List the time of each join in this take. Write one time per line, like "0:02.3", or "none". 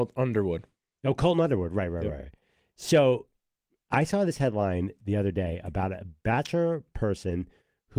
none